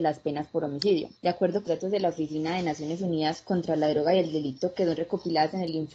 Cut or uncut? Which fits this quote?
cut